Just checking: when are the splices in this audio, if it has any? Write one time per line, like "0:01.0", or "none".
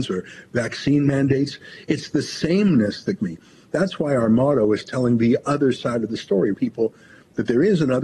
0:03.2
0:06.5